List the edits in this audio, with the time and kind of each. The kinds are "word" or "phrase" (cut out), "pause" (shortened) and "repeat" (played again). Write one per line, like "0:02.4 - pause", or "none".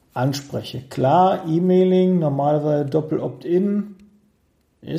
none

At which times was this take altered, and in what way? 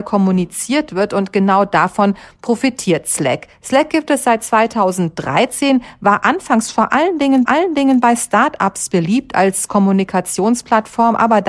0:07.5 - repeat

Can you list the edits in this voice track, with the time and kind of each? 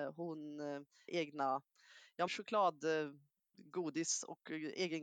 0:01.1 - word
0:02.3 - word

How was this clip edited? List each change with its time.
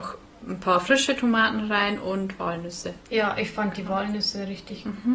0:03.0 - pause

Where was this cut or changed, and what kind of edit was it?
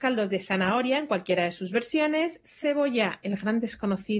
none

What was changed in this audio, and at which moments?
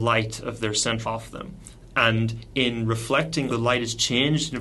0:01.0 - word
0:03.5 - phrase

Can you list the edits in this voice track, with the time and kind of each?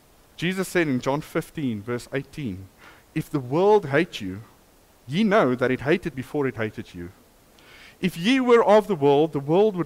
0:06.1 - word

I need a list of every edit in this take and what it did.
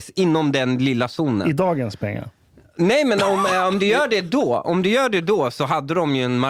none

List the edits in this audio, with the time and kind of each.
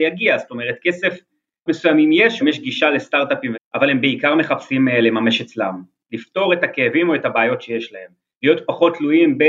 0:01.7 - word
0:02.4 - word
0:03.5 - word

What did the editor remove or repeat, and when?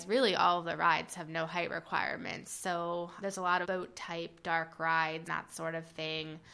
0:03.2 - word
0:03.6 - word
0:05.3 - word

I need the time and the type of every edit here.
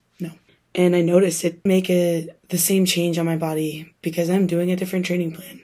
0:01.7 - word

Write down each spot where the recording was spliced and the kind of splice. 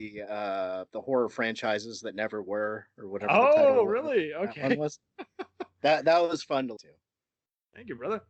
0:06.8 - word

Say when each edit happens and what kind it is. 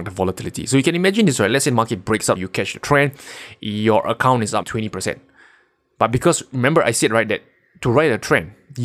0:02.4 - word
0:04.6 - word

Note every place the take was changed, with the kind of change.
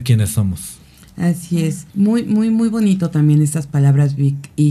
0:01.9 - pause

